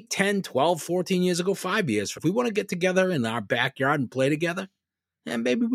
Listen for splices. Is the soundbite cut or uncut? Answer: cut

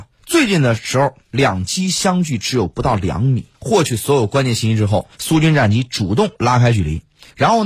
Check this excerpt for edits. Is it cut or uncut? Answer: cut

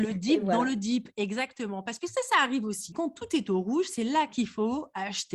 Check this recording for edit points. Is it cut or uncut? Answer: uncut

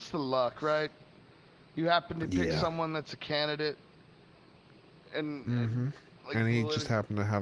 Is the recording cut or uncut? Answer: uncut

